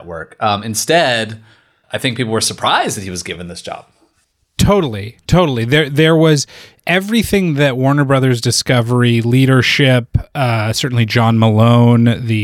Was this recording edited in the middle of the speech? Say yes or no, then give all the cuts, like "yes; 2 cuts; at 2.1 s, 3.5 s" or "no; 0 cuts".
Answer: no; 0 cuts